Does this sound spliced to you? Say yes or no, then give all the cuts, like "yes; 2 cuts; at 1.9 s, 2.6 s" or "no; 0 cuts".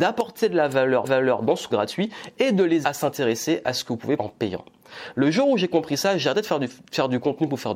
yes; 4 cuts; at 1.0 s, 1.7 s, 2.8 s, 4.2 s